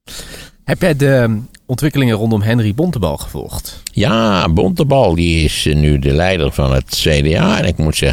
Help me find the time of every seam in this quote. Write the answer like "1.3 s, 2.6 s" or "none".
5.1 s